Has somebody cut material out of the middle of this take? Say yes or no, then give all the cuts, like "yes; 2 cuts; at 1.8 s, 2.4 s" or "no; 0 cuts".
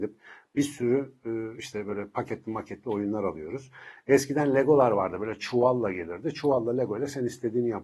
no; 0 cuts